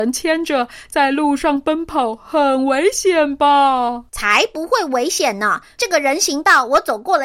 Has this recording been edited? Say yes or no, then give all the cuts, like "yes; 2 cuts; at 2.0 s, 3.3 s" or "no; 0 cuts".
yes; 1 cut; at 4.1 s